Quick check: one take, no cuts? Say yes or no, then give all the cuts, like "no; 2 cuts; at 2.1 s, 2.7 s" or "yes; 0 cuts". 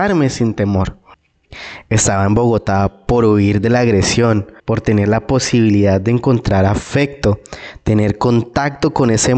no; 1 cut; at 4.6 s